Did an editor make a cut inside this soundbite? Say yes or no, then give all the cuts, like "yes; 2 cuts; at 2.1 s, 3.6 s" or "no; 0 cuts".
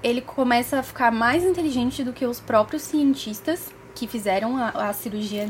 no; 0 cuts